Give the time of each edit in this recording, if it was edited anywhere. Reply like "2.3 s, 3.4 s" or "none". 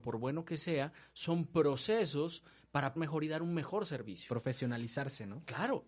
3.0 s